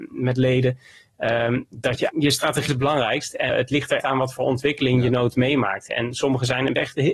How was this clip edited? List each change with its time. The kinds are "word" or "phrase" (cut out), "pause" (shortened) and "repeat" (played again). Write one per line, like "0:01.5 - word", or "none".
0:02.1 - word
0:02.7 - word
0:03.5 - word
0:04.0 - word

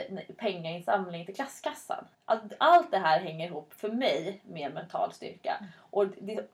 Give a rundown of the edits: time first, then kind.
0:02.1 - pause

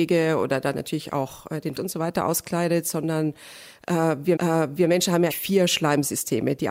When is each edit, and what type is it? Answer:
0:01.7 - word
0:04.4 - repeat
0:05.3 - word

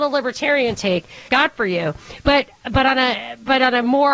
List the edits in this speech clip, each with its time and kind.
0:01.3 - phrase

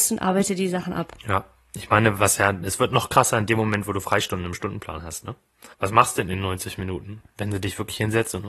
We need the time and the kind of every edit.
0:01.2 - pause
0:05.7 - pause

